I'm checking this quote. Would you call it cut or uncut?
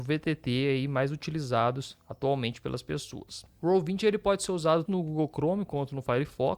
cut